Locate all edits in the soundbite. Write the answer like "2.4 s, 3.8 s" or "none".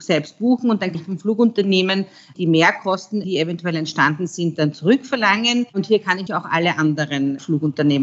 0.9 s, 5.7 s, 6.3 s

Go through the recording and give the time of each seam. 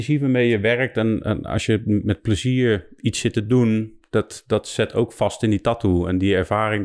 none

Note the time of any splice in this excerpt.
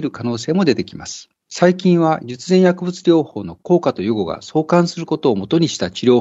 1.4 s

